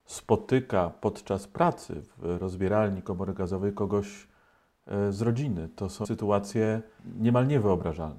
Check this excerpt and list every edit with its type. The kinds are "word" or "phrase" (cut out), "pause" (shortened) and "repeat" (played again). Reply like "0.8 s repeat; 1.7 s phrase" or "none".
6.0 s word